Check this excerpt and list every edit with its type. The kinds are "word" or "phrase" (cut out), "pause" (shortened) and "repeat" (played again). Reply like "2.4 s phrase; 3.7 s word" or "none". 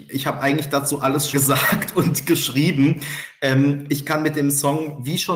1.3 s word